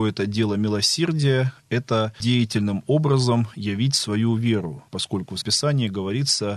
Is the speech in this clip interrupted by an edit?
yes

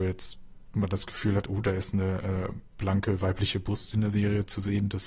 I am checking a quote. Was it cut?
no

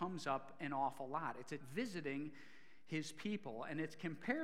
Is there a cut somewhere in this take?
yes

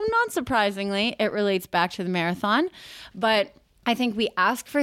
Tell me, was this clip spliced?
no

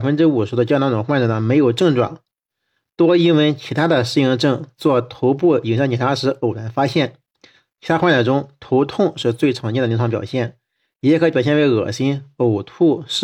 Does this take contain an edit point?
no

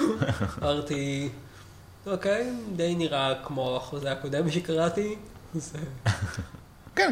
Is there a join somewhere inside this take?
no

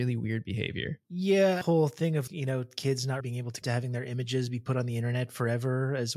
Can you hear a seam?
yes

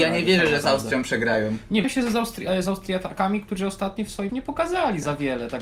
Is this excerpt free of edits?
no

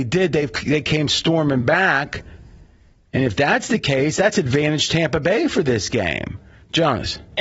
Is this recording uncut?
yes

